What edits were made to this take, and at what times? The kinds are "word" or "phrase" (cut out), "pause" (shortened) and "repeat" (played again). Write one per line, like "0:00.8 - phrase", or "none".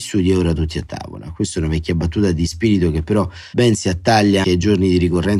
0:04.4 - word